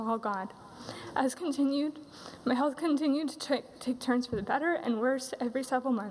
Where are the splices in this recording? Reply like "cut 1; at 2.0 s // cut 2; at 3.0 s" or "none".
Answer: cut 1; at 1.3 s